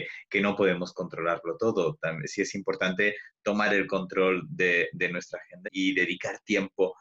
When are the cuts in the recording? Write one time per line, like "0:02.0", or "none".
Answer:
0:05.6